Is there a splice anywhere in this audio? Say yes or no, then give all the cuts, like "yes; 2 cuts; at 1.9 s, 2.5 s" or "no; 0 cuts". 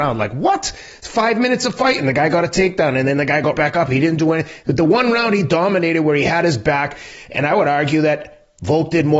yes; 1 cut; at 3.5 s